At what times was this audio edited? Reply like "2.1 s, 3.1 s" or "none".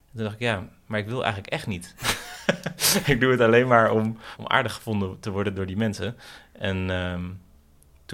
none